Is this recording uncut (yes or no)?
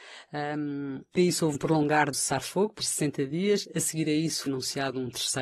no